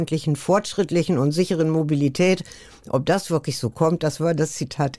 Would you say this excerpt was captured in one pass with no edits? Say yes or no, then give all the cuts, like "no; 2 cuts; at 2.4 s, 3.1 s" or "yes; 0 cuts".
yes; 0 cuts